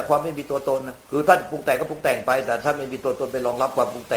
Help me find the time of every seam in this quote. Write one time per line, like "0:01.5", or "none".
0:01.0